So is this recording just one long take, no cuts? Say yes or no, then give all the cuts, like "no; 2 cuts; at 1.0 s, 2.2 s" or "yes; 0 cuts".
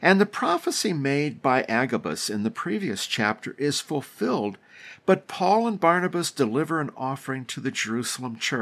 yes; 0 cuts